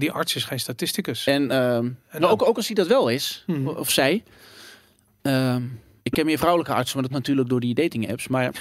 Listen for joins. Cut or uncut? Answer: cut